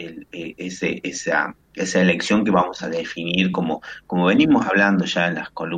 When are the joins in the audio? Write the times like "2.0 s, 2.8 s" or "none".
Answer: none